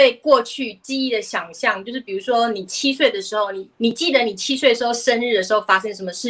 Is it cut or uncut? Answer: cut